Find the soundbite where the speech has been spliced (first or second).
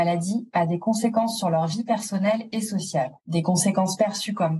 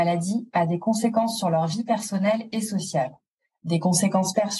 first